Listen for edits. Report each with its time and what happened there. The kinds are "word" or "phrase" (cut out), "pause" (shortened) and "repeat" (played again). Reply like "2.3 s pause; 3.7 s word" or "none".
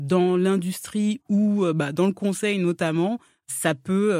none